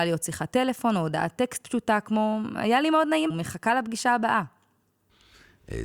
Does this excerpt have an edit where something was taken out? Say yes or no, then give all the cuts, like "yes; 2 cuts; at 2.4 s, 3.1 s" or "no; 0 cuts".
yes; 1 cut; at 3.3 s